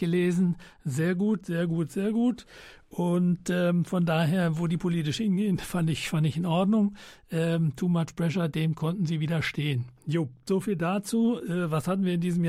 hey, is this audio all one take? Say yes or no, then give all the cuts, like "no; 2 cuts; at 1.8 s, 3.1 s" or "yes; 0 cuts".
yes; 0 cuts